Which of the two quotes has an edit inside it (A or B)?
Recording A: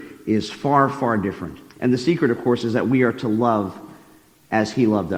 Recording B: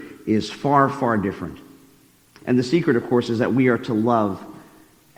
A